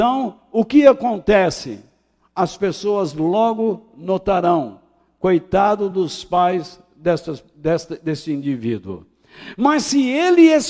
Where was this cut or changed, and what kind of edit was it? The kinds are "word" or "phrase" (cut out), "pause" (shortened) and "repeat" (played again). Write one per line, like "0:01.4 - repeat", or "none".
none